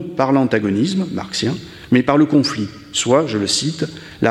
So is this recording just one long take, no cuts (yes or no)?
yes